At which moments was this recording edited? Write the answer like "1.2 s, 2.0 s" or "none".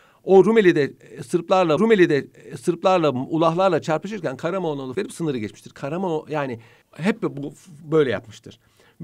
1.8 s, 4.9 s, 6.8 s